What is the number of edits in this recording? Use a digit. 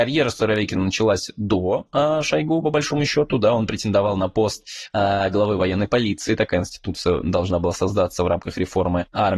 0